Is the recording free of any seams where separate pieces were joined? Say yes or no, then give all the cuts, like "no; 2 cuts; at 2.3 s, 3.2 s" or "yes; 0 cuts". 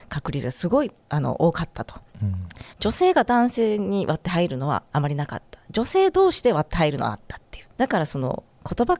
no; 4 cuts; at 1.0 s, 2.1 s, 2.7 s, 7.7 s